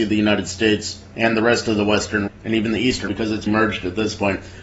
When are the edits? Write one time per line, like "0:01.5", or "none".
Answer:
0:02.3
0:03.1
0:03.5